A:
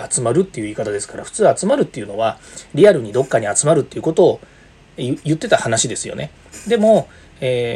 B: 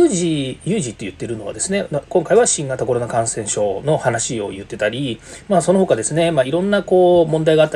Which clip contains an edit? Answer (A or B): A